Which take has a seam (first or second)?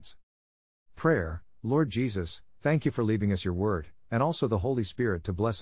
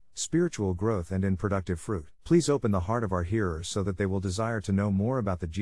second